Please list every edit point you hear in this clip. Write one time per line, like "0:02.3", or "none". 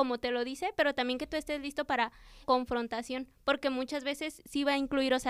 0:02.4

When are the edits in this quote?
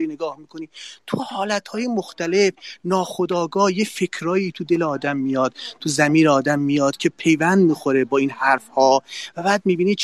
none

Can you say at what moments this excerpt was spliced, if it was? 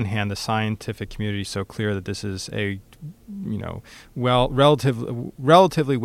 0:01.4

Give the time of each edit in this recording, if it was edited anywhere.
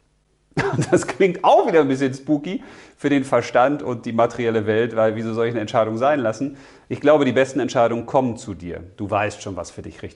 none

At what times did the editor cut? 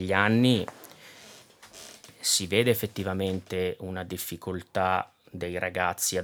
none

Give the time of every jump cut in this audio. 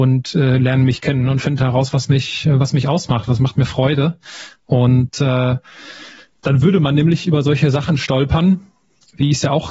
none

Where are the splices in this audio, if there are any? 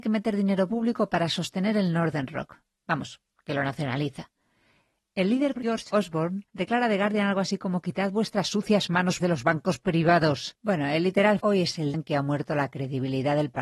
0:05.6
0:09.2
0:11.4
0:11.9

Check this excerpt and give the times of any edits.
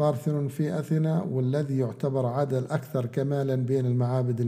none

